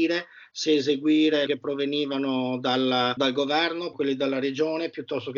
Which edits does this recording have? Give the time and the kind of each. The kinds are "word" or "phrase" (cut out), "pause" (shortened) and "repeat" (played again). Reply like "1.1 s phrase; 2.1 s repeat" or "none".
1.5 s phrase; 3.2 s word; 3.9 s phrase